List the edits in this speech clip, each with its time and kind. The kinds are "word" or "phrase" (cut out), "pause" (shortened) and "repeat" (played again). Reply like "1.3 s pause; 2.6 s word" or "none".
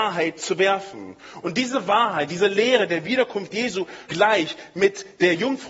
4.1 s word